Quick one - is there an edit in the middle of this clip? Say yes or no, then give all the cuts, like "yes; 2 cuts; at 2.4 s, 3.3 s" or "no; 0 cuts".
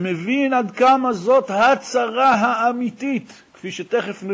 no; 0 cuts